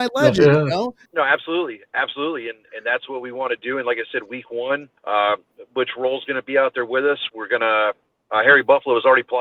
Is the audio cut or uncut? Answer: cut